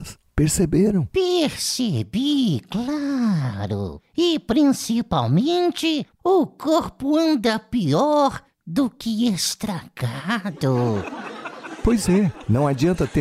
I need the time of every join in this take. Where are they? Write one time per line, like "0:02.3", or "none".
0:06.2